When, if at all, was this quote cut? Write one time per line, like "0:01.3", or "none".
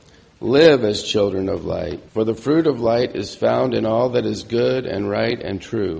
0:02.1